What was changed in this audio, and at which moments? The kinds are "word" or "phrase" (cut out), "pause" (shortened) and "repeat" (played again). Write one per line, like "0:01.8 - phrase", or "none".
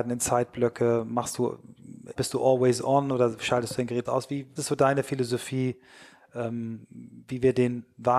0:02.2 - word
0:04.0 - word
0:04.6 - word